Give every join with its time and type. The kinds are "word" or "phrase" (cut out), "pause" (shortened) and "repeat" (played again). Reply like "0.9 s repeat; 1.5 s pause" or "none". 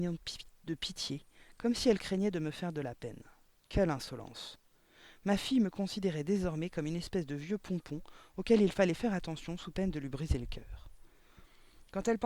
none